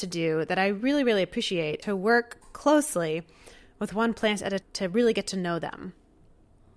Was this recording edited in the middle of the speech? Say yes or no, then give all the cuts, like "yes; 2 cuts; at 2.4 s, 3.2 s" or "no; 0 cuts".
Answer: yes; 2 cuts; at 1.8 s, 4.6 s